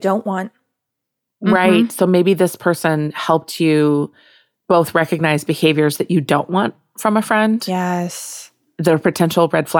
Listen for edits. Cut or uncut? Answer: uncut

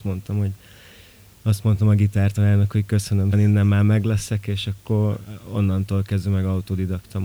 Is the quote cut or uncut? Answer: cut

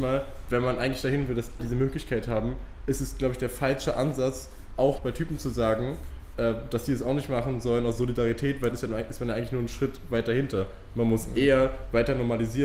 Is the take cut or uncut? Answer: cut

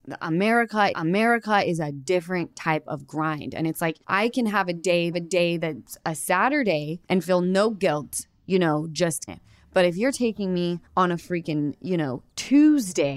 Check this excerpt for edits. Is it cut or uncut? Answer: cut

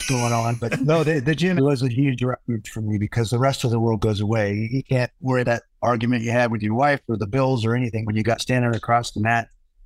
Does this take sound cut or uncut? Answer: cut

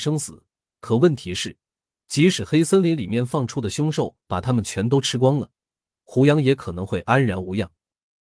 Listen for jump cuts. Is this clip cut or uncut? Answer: uncut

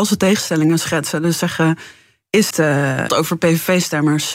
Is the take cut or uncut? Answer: cut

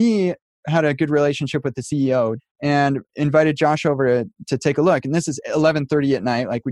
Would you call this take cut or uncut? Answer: cut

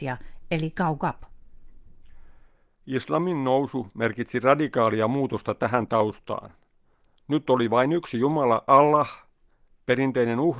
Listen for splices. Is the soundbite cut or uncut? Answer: uncut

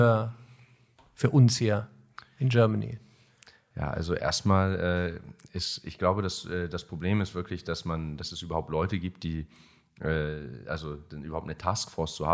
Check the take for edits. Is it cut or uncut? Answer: uncut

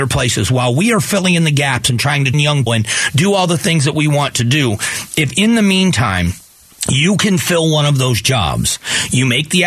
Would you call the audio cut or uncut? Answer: cut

